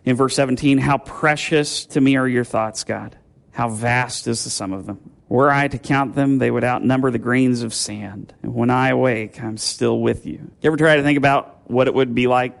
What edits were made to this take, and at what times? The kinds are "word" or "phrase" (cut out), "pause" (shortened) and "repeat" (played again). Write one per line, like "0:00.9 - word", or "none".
0:03.4 - pause
0:05.2 - pause
0:08.4 - pause
0:10.5 - pause